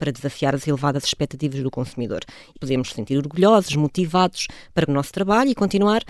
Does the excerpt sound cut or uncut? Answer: cut